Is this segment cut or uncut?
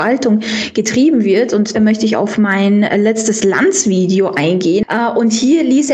cut